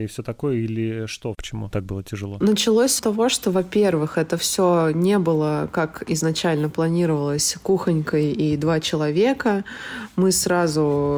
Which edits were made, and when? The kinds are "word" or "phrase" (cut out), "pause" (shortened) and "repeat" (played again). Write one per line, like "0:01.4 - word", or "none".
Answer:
0:03.0 - word